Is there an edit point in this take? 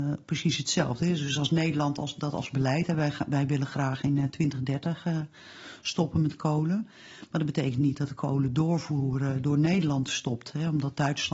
no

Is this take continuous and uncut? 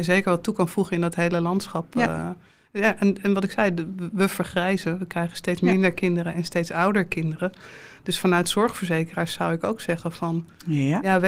yes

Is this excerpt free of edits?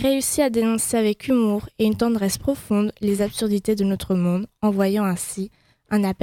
yes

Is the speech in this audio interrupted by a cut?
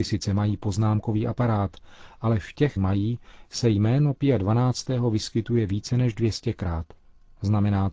yes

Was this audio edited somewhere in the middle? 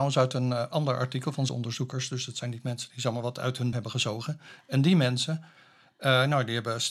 yes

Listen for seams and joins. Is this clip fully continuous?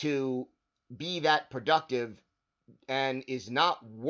yes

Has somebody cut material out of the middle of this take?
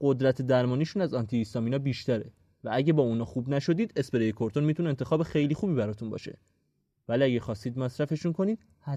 no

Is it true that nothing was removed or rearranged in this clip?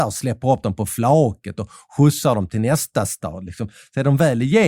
yes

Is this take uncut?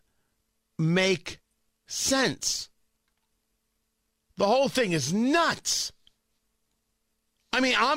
yes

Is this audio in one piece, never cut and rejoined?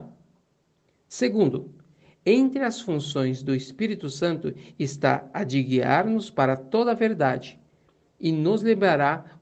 yes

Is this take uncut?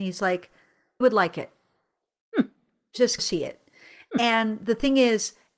no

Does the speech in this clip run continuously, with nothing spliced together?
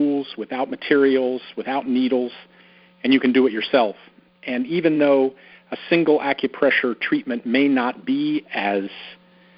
yes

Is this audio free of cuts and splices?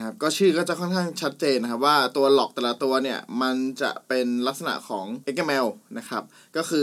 no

